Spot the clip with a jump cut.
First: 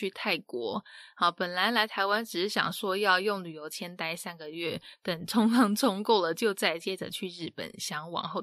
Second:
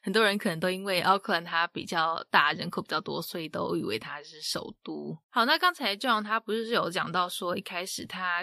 second; 1 cut; at 5.2 s

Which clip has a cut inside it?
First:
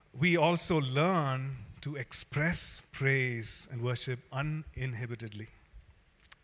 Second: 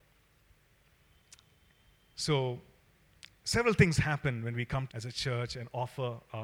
second; 1 cut; at 4.9 s

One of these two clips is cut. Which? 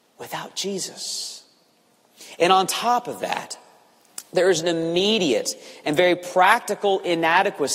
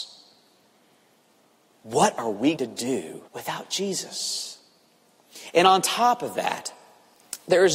second; 2 cuts; at 2.6 s, 3.3 s

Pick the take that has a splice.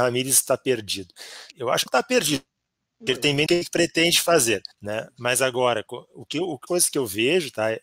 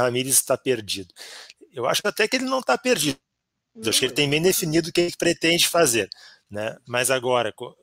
first; 6 cuts; at 1.5 s, 1.9 s, 3.1 s, 3.5 s, 4.7 s, 6.7 s

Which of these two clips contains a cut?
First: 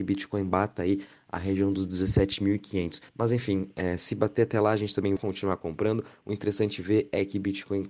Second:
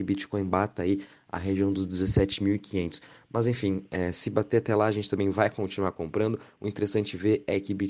first; 2 cuts; at 3.1 s, 5.2 s

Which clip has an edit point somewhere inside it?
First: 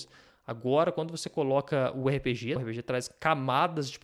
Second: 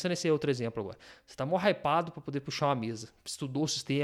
first; 1 cut; at 2.6 s

